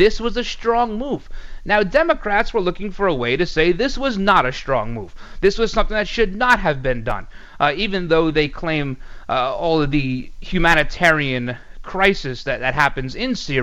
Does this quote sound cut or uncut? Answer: uncut